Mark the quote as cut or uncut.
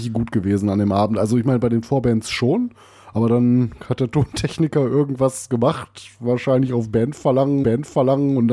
cut